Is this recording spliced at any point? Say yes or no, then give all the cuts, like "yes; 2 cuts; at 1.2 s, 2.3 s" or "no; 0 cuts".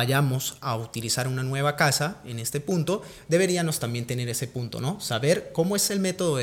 no; 0 cuts